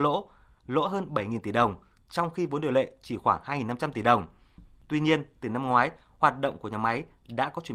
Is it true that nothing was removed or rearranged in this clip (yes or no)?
yes